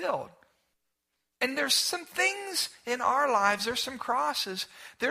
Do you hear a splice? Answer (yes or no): no